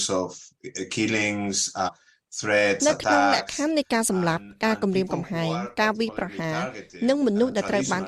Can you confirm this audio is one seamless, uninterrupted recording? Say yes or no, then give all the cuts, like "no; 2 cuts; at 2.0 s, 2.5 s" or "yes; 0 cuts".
no; 1 cut; at 1.9 s